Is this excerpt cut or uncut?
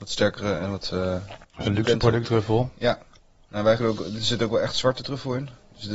cut